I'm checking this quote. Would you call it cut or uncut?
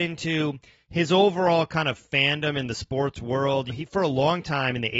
cut